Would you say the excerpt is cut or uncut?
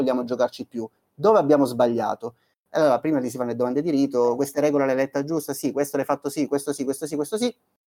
uncut